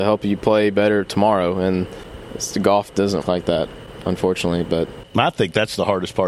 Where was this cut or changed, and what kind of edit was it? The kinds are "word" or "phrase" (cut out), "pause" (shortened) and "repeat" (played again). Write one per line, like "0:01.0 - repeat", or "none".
0:03.2 - word